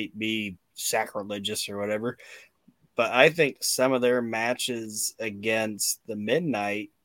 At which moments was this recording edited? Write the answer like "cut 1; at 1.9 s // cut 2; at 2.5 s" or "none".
none